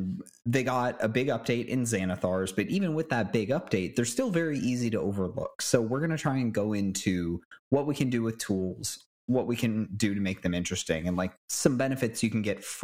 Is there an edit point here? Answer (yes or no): yes